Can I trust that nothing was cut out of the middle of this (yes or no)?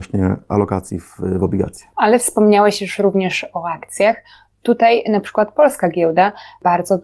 yes